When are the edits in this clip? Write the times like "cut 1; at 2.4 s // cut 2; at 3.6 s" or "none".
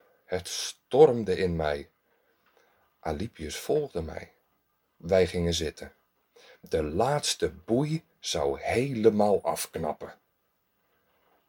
none